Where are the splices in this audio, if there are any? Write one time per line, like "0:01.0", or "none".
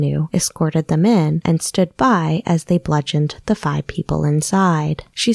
none